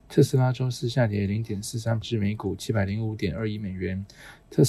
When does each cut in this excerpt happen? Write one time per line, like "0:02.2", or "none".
0:02.0